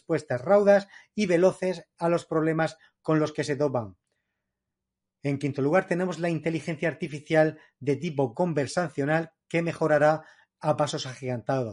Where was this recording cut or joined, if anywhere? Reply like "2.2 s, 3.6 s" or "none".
none